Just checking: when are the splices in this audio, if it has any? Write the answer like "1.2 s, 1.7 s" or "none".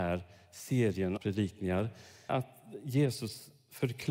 1.2 s, 2.3 s